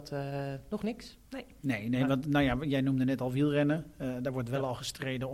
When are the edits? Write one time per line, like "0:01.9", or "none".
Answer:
0:01.3